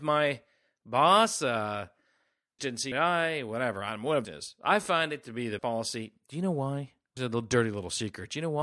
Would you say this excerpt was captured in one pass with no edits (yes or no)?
no